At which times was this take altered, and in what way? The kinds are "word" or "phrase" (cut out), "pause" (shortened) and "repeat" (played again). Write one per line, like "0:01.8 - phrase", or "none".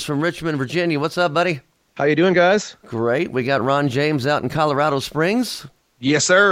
none